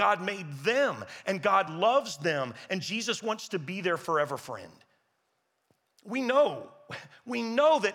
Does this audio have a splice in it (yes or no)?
no